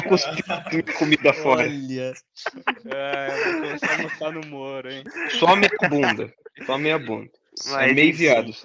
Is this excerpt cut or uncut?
uncut